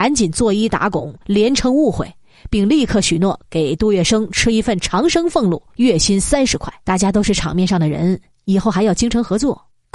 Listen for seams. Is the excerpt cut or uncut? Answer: cut